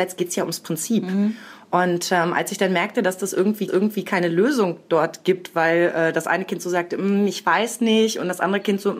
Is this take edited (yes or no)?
yes